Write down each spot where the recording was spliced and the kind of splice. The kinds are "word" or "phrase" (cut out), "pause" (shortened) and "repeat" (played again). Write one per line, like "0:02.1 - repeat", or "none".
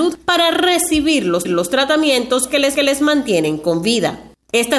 0:01.4 - repeat
0:02.7 - repeat